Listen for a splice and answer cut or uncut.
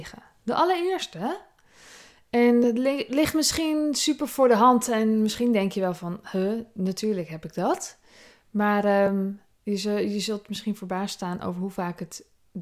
uncut